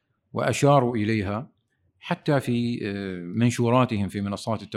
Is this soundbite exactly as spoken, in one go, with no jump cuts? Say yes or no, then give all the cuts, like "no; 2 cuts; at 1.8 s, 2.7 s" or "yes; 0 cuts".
yes; 0 cuts